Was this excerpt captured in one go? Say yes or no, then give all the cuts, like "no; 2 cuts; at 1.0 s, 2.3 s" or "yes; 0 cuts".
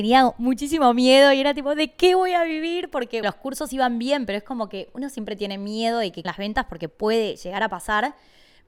no; 2 cuts; at 3.2 s, 6.2 s